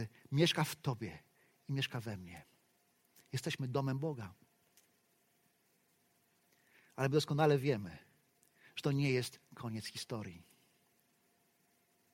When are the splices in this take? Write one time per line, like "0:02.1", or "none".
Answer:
none